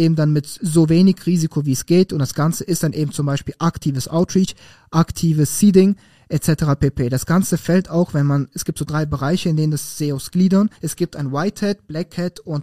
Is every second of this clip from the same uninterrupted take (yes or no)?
no